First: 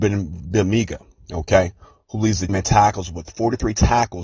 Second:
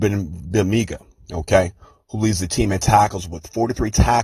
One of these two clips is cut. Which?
first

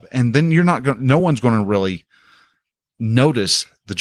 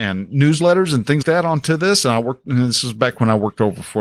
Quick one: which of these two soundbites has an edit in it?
second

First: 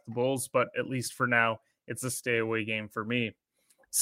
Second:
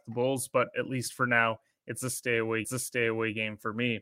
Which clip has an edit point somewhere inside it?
second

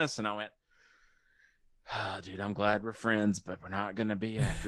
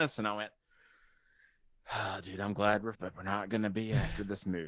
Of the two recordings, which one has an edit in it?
second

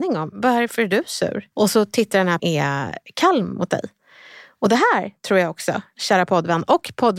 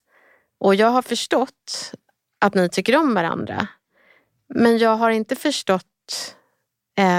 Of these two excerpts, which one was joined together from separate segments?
first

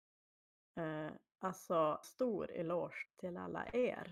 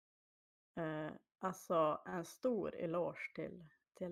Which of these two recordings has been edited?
first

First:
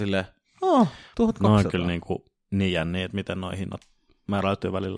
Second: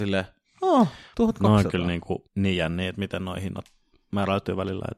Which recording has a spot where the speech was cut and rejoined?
second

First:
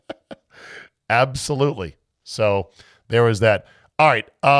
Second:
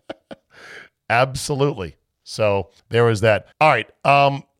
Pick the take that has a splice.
second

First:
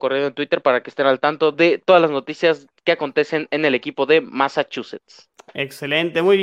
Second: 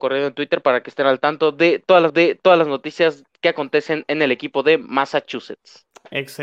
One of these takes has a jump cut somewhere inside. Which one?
second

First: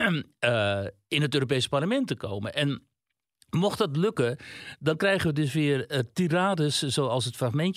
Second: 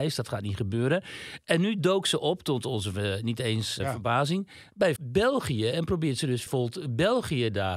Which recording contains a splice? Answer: second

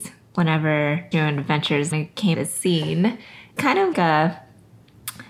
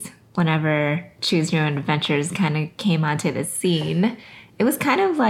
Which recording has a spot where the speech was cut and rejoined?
first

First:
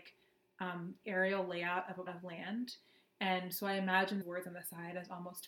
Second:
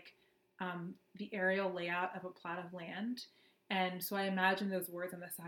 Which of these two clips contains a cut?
first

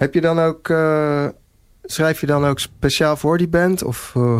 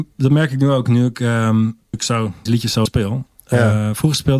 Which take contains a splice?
second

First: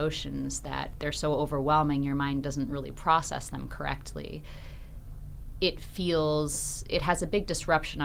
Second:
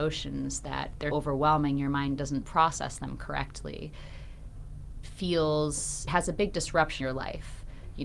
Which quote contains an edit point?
second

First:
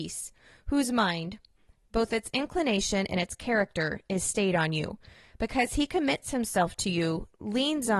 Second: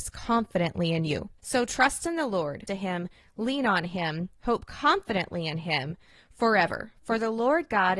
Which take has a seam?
second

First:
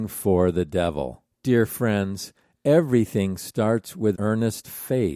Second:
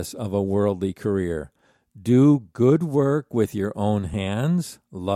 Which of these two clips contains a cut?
first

